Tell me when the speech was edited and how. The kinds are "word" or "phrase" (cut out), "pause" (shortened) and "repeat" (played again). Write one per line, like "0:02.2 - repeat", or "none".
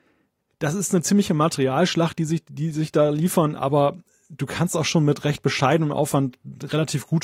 none